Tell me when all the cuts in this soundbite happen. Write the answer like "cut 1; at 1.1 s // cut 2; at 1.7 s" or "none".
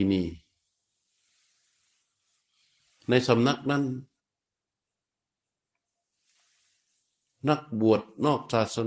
none